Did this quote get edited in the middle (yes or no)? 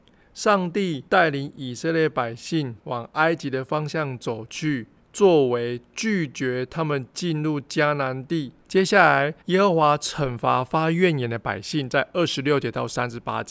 yes